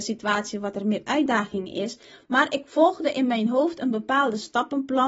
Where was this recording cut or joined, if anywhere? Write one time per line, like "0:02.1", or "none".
none